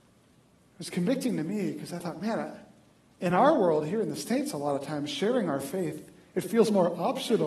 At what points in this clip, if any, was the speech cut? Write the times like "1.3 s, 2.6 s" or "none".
none